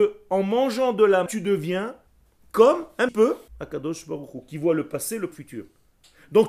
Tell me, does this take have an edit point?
yes; 5 cuts; at 1.3 s, 2.1 s, 3.1 s, 3.5 s, 5.3 s

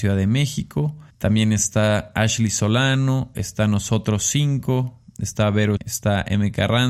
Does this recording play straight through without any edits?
no; 2 cuts; at 1.1 s, 5.8 s

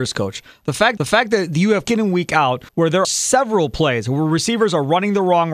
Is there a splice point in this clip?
yes; 4 cuts; at 1.0 s, 1.8 s, 2.7 s, 3.0 s

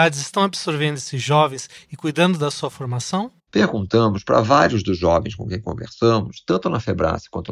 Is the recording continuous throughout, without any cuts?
yes; 0 cuts

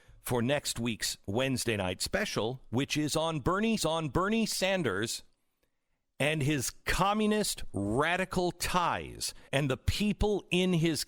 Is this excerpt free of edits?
no; 2 cuts; at 3.8 s, 9.5 s

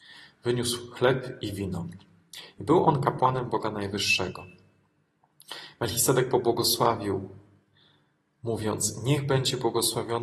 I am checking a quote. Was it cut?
no; 0 cuts

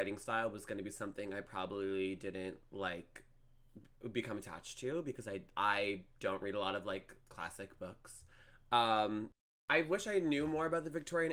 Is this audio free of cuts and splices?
no; 1 cut; at 7.2 s

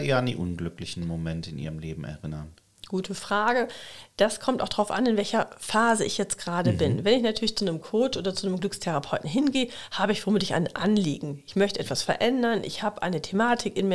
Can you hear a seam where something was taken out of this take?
no; 0 cuts

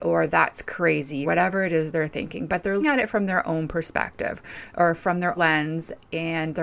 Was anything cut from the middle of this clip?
yes; 3 cuts; at 1.2 s, 2.8 s, 5.4 s

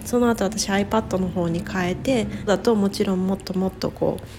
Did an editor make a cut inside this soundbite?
yes; 1 cut; at 2.5 s

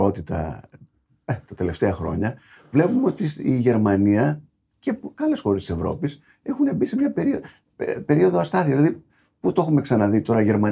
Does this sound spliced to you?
no; 0 cuts

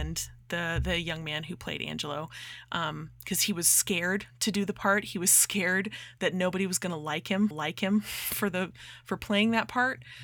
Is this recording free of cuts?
no; 1 cut; at 7.5 s

